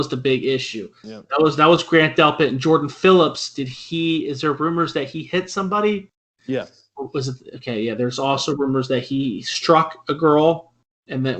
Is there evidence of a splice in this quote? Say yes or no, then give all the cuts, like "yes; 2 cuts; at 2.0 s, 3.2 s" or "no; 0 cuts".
yes; 1 cut; at 1.0 s